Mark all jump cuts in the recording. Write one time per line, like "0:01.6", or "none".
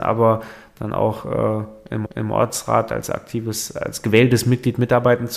0:02.1